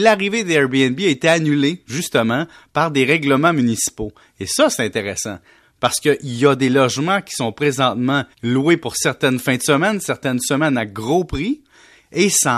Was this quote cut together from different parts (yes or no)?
yes